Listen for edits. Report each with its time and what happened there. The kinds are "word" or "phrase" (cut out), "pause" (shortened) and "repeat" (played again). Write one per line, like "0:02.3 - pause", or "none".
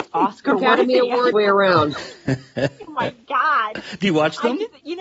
0:01.3 - phrase
0:02.9 - word